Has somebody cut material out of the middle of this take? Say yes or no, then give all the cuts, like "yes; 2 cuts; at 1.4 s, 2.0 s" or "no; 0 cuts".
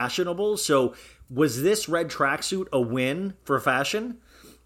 no; 0 cuts